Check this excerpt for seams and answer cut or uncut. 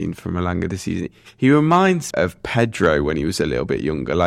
cut